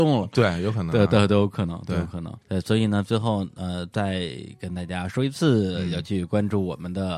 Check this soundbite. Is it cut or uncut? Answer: cut